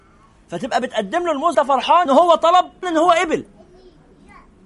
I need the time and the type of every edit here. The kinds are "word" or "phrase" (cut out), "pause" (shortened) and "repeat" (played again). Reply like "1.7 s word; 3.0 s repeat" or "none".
1.5 s word; 2.1 s word; 2.8 s word